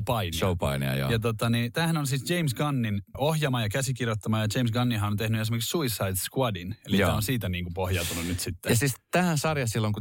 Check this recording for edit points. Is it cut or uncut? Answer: cut